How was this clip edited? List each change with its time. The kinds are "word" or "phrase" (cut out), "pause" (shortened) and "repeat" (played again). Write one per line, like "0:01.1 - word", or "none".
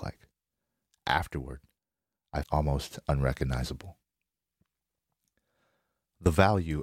0:02.4 - word